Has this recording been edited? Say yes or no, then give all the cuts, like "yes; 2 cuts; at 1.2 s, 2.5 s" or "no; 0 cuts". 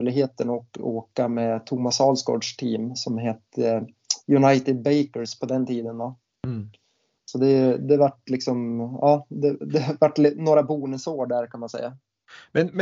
no; 0 cuts